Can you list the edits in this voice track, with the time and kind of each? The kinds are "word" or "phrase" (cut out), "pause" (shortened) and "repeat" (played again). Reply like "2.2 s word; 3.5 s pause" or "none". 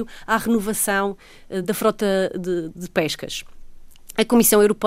none